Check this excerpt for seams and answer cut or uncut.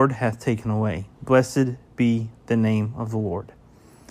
cut